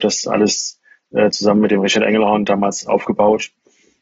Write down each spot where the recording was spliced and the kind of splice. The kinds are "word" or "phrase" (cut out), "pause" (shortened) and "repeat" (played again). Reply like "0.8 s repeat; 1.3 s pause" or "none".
none